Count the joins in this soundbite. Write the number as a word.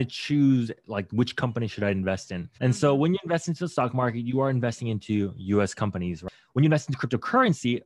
one